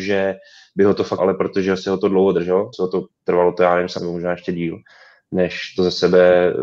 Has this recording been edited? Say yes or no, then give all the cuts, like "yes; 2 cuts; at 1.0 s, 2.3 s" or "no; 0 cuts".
yes; 4 cuts; at 1.2 s, 2.7 s, 3.1 s, 4.0 s